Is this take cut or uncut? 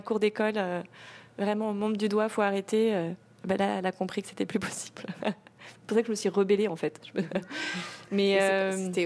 uncut